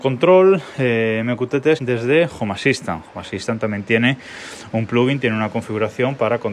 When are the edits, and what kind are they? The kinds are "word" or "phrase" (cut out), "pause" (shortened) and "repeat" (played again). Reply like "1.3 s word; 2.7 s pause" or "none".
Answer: 1.8 s phrase